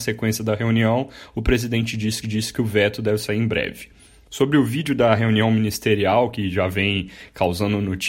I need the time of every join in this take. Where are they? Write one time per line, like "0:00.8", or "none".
0:02.2